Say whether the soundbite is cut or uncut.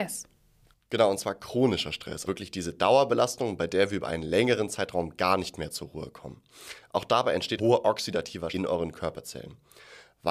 cut